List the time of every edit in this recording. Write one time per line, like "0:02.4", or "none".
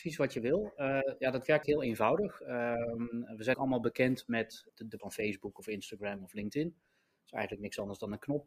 0:01.6
0:03.5
0:04.7
0:05.0